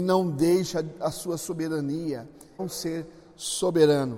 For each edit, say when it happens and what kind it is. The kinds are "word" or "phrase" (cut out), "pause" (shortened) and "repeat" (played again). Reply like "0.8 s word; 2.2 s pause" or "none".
2.6 s phrase

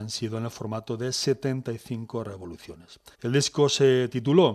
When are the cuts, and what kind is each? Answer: 3.1 s pause

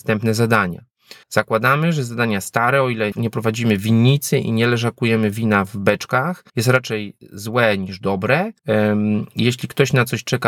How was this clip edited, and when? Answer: 1.2 s pause; 3.1 s word; 6.5 s pause; 8.6 s pause

